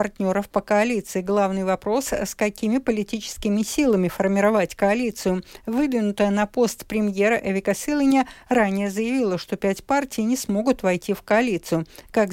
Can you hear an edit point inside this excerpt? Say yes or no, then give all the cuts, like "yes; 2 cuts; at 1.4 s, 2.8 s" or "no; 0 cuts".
no; 0 cuts